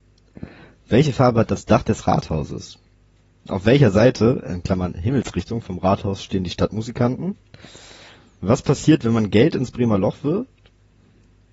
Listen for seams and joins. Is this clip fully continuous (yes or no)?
yes